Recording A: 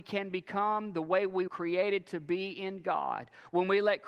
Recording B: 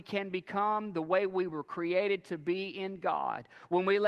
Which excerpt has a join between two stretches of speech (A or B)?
A